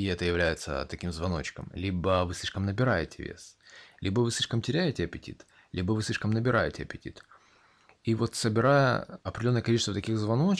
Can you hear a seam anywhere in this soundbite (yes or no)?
no